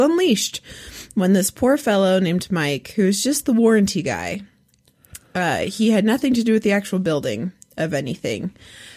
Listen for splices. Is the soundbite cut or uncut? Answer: uncut